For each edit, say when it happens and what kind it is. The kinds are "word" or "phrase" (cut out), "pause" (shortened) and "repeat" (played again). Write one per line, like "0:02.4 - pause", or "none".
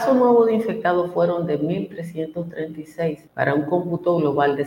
0:03.3 - pause